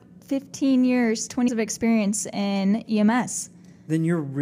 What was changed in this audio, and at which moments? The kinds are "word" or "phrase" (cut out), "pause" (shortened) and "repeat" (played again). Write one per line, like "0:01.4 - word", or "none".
0:01.5 - word

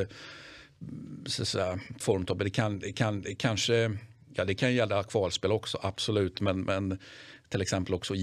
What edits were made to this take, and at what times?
0:02.0 - word
0:02.9 - repeat

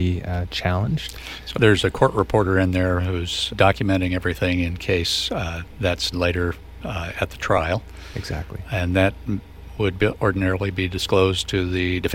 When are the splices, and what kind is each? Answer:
0:01.5 - word
0:03.5 - word
0:06.1 - word

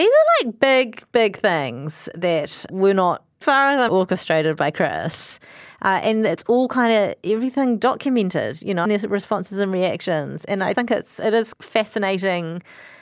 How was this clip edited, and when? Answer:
0:02.7 - word
0:03.4 - word
0:03.9 - word
0:08.8 - word
0:10.7 - word
0:11.5 - word

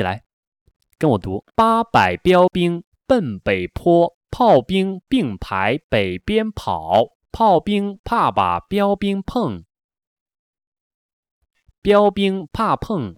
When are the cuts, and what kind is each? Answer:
0:01.5 - pause
0:04.2 - pause
0:07.2 - pause

